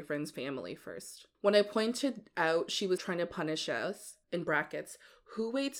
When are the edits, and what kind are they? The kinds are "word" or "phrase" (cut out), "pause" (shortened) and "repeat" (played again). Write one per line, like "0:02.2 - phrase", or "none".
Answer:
0:01.3 - pause
0:03.0 - word
0:04.2 - pause